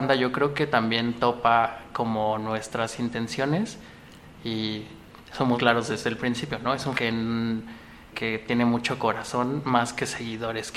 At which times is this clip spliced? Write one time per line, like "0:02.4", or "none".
0:05.5
0:06.9
0:08.1